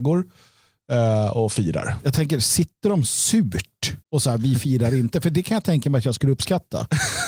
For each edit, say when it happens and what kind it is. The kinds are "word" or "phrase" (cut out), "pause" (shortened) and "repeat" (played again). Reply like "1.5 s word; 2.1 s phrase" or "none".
4.0 s pause

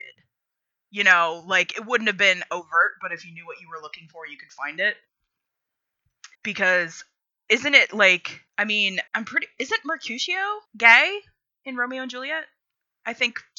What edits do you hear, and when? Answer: 6.3 s pause; 8.5 s pause; 9.1 s pause; 10.7 s pause

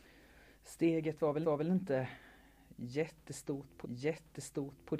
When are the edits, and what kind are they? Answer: 1.4 s repeat; 3.8 s repeat

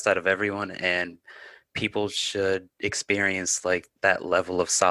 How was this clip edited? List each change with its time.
4.0 s pause

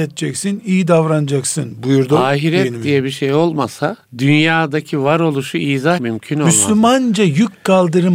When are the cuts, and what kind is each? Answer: 4.1 s pause; 6.0 s word

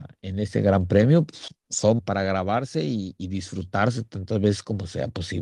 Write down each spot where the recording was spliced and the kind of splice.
2.0 s word

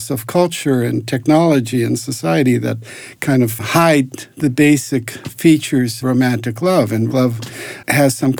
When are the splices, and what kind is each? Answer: 6.0 s word; 7.1 s word

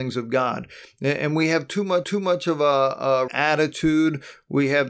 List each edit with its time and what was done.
2.0 s repeat; 3.3 s word

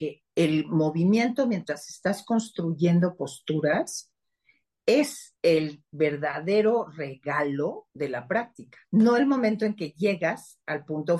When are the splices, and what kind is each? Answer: 5.4 s pause; 7.9 s pause; 8.8 s pause

